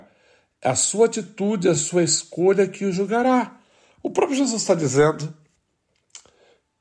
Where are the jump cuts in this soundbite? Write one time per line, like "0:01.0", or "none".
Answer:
none

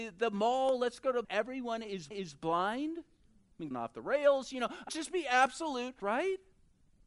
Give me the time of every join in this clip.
0:01.2
0:02.1
0:03.7
0:04.9
0:06.0

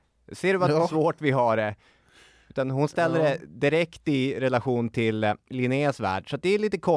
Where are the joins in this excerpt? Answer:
none

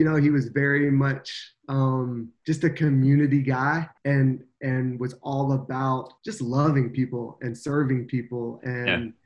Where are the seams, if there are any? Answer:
0:02.4
0:04.0
0:06.2

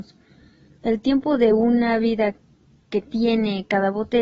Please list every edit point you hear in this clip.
none

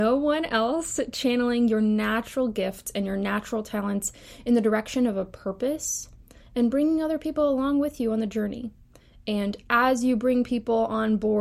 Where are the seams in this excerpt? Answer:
none

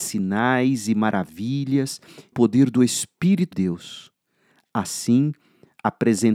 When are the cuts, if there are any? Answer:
0:02.3
0:03.5

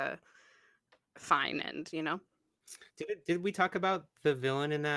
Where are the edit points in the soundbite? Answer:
0:02.9

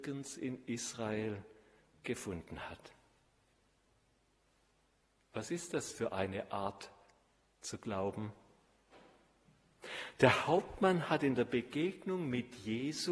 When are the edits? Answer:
none

